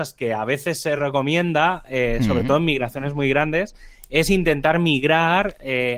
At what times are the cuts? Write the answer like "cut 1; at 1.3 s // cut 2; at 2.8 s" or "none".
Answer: none